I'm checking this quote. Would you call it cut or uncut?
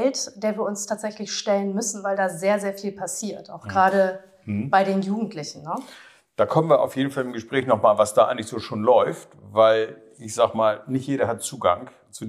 uncut